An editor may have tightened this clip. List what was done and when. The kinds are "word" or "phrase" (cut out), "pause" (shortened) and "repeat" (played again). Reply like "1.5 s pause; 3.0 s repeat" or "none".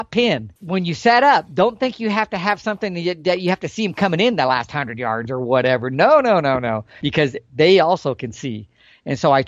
none